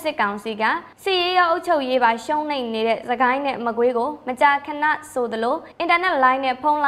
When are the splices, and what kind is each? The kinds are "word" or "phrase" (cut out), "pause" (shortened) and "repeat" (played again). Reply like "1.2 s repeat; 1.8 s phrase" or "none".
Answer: 0.9 s pause; 5.7 s pause

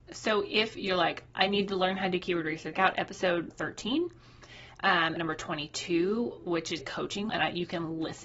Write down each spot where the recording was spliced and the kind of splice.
1.3 s word; 2.7 s word; 3.5 s word; 5.2 s word; 6.8 s word; 7.3 s word

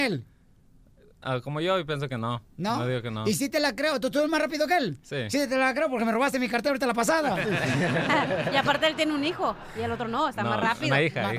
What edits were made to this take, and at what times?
none

